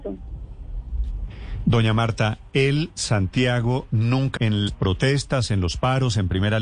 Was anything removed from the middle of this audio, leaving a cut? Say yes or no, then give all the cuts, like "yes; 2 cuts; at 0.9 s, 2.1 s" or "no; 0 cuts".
yes; 2 cuts; at 4.4 s, 4.7 s